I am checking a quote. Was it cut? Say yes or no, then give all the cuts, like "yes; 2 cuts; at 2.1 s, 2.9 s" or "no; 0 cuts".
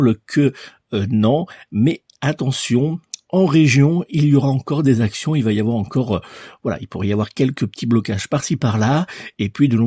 no; 0 cuts